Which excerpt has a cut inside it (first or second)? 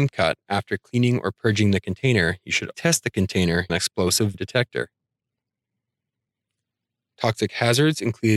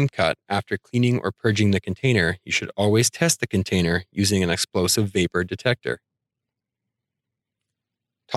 first